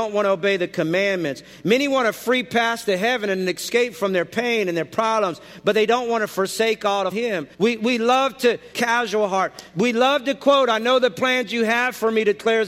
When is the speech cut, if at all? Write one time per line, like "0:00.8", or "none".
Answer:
0:07.1
0:07.5
0:08.7